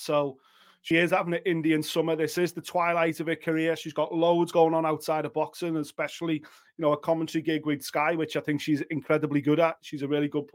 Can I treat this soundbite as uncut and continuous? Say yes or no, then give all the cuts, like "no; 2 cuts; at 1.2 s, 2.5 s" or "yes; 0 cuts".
no; 1 cut; at 0.9 s